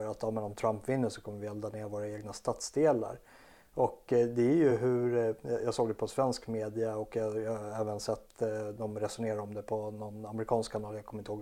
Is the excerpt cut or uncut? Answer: uncut